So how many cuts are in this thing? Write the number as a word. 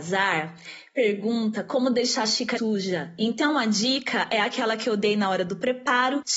one